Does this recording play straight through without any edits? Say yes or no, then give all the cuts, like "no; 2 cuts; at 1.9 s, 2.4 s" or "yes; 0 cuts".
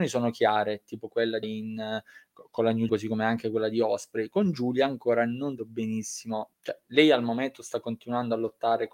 no; 4 cuts; at 1.4 s, 2.9 s, 5.6 s, 6.5 s